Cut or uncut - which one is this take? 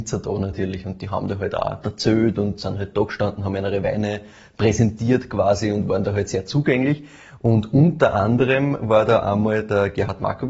uncut